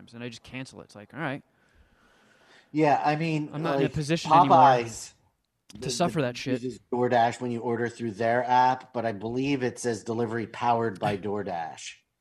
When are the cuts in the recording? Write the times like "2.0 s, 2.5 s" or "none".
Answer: none